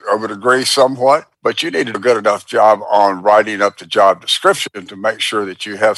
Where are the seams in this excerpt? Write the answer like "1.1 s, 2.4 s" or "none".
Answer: 1.3 s, 1.9 s